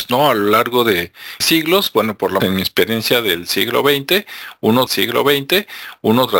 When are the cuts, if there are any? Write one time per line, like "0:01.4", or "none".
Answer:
0:01.4
0:02.4
0:04.9